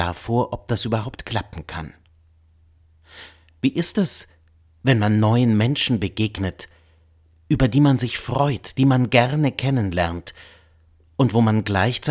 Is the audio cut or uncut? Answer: uncut